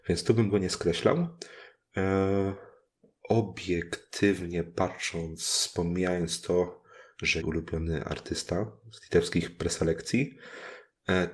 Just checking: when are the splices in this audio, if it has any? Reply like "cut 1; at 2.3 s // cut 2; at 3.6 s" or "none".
cut 1; at 2.9 s // cut 2; at 7.4 s